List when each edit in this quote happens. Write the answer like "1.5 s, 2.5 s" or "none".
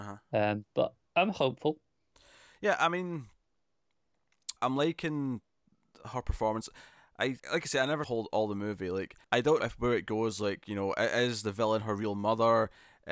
1.1 s, 4.6 s, 7.4 s, 8.0 s, 9.2 s, 9.6 s